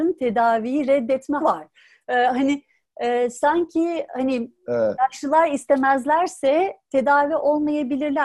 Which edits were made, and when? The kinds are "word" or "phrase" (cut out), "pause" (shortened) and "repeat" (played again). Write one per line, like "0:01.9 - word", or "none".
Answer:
0:01.4 - word